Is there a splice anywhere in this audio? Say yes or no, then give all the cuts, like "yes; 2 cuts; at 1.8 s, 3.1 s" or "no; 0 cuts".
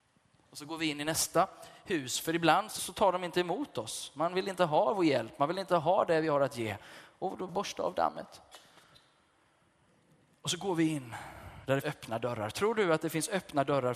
yes; 3 cuts; at 2.8 s, 7.5 s, 11.8 s